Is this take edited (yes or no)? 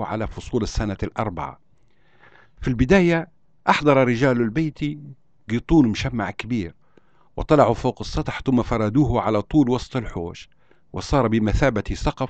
no